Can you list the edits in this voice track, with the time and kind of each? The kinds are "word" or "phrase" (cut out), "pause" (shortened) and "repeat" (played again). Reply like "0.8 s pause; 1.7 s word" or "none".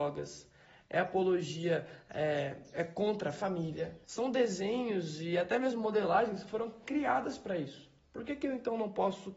4.0 s pause